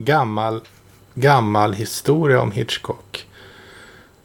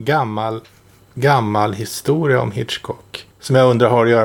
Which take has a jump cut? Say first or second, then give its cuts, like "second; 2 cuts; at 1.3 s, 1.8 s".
second; 1 cut; at 3.3 s